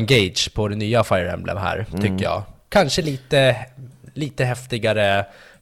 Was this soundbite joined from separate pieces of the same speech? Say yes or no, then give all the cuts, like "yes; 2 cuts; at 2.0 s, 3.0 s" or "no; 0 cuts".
no; 0 cuts